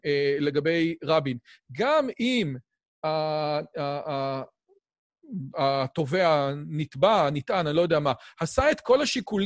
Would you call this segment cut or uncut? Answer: uncut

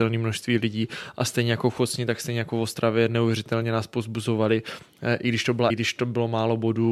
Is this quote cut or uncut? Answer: cut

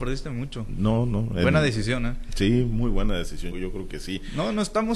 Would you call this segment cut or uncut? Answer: cut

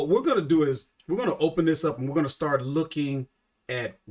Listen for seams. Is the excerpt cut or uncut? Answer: cut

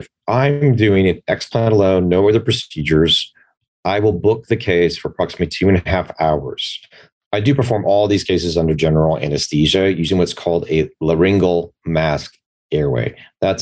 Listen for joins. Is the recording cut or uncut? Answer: uncut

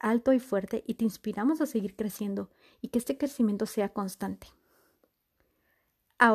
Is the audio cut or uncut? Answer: uncut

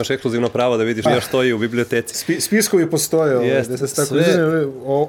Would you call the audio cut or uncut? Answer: cut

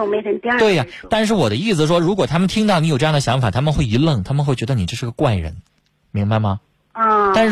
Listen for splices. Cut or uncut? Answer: uncut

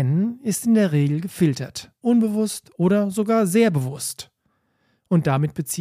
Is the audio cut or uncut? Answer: cut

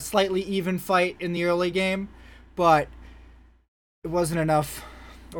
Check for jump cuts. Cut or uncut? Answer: uncut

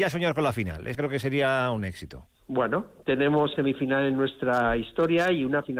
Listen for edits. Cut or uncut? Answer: cut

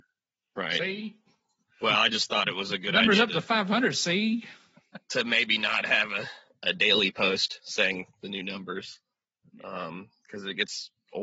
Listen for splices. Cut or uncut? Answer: uncut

